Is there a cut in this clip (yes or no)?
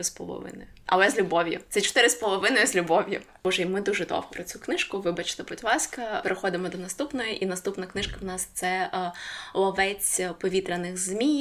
yes